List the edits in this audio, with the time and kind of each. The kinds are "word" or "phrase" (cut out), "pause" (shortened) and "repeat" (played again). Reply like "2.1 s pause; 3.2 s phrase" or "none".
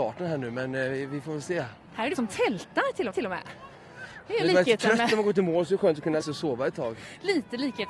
1.8 s pause; 2.2 s word; 3.1 s repeat; 6.2 s word